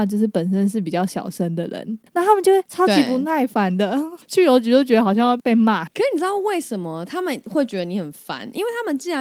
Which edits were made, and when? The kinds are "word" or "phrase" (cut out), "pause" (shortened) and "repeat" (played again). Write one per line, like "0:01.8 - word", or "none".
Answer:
0:02.1 - pause
0:02.7 - pause